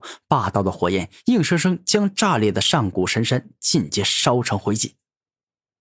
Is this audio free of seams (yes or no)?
yes